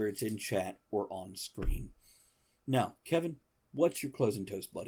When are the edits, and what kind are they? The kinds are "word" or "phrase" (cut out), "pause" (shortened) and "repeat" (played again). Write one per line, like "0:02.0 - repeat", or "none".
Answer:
none